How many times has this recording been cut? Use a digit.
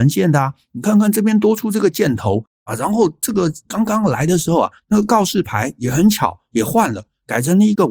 1